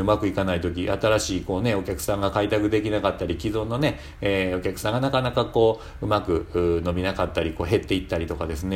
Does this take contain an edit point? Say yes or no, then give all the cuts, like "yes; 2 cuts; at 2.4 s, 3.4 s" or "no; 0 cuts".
no; 0 cuts